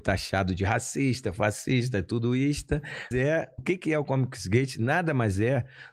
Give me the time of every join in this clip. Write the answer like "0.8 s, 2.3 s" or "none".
3.1 s, 3.6 s